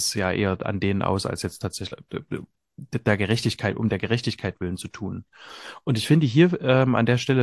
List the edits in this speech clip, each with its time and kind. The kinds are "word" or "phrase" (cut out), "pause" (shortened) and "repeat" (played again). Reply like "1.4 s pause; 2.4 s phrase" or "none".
none